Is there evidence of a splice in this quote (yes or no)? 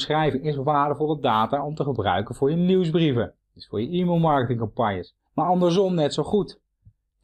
yes